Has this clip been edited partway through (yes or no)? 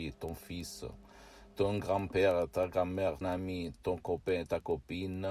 yes